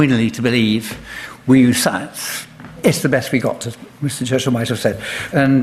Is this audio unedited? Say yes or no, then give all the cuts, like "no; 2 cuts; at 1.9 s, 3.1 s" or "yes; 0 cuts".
yes; 0 cuts